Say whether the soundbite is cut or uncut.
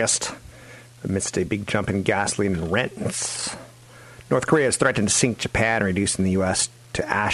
uncut